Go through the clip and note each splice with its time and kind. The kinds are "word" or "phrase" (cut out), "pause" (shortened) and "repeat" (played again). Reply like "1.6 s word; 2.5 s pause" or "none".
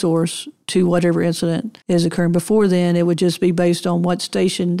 1.8 s pause